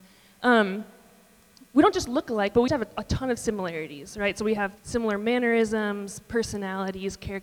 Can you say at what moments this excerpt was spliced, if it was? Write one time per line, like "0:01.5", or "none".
0:02.7
0:04.8

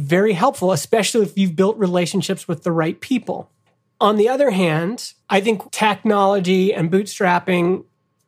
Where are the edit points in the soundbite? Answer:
0:03.7
0:05.2
0:05.7

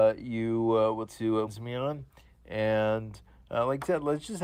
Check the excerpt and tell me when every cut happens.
0:01.1
0:01.5

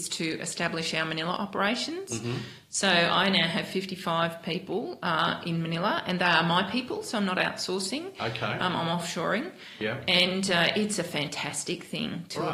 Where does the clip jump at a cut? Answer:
none

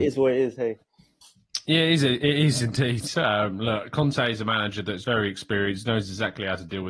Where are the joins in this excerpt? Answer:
none

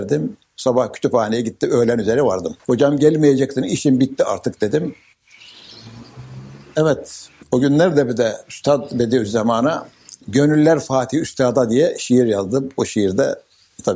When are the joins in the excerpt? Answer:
0:02.6
0:10.2

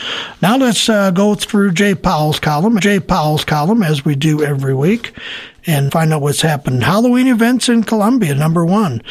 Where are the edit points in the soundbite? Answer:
0:02.8
0:05.9

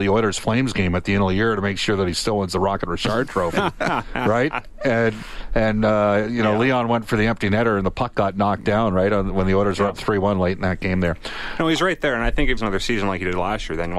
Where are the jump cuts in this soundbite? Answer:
0:12.6

